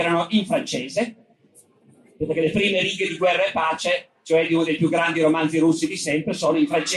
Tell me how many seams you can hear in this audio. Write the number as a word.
zero